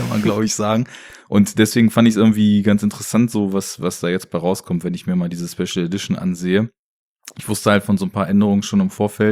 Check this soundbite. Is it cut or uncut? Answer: uncut